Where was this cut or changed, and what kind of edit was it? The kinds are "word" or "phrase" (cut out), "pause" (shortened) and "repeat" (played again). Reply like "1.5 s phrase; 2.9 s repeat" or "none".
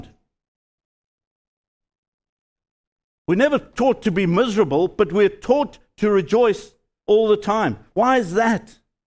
none